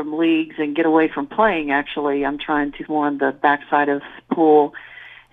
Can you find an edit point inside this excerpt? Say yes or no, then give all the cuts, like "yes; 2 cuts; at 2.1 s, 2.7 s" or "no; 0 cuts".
yes; 1 cut; at 2.9 s